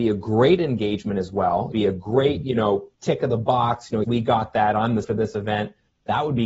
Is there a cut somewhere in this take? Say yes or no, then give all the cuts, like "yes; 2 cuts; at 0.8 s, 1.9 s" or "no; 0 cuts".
yes; 4 cuts; at 1.7 s, 2.9 s, 4.0 s, 5.0 s